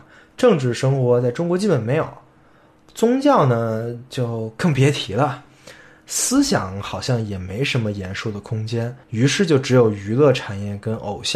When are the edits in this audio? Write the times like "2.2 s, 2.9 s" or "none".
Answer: 9.0 s